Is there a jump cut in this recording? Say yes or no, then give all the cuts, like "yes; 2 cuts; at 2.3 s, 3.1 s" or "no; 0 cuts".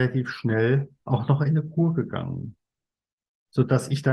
yes; 1 cut; at 1.0 s